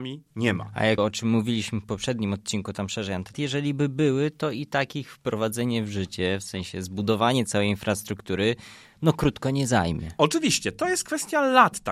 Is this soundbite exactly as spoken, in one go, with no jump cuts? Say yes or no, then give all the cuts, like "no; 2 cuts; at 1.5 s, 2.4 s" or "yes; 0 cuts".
no; 2 cuts; at 1.0 s, 3.3 s